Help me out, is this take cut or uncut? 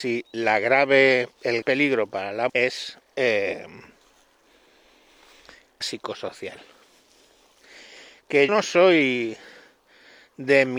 cut